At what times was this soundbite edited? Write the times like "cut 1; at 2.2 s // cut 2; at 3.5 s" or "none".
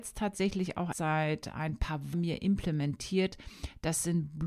cut 1; at 0.9 s // cut 2; at 2.1 s